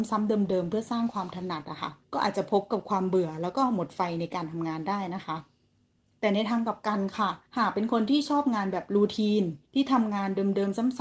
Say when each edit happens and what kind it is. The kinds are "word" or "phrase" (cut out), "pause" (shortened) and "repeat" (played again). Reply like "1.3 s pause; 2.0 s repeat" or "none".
2.0 s pause; 7.5 s pause; 9.6 s pause